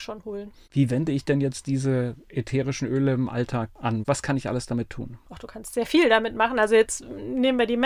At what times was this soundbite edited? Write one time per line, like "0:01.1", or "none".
none